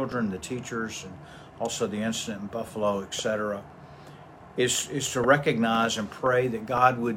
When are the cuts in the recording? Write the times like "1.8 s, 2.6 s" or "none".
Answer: none